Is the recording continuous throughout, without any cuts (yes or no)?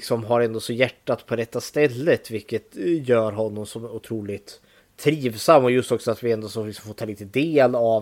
no